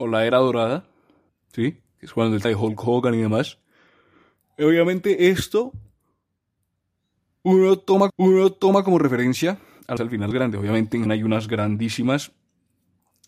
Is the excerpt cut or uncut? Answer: cut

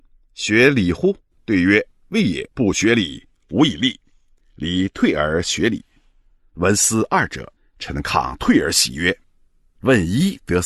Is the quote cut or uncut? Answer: cut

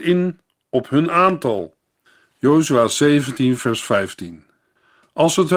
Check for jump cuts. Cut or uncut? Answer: uncut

